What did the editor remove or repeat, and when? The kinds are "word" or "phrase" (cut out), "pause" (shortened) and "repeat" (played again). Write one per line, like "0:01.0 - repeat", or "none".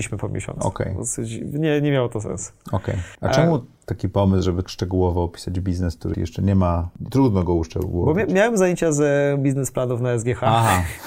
0:04.6 - word
0:06.1 - phrase